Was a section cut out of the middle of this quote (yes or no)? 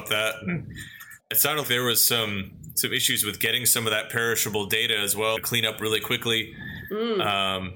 yes